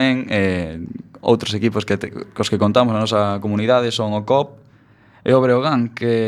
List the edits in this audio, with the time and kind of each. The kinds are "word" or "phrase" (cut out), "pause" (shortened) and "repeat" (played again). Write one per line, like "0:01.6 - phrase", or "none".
0:02.1 - word